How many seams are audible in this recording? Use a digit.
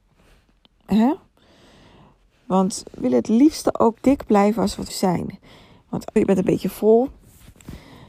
4